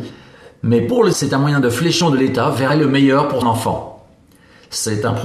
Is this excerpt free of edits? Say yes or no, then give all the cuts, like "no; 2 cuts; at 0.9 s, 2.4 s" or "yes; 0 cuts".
no; 4 cuts; at 1.1 s, 2.0 s, 2.7 s, 3.4 s